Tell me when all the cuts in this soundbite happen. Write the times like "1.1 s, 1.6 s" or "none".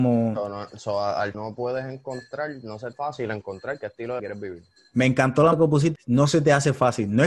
1.3 s, 2.9 s, 4.2 s, 5.5 s, 6.0 s